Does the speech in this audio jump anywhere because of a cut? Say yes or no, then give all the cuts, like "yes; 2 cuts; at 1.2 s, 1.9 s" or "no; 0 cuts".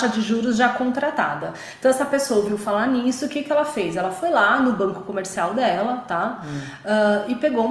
no; 0 cuts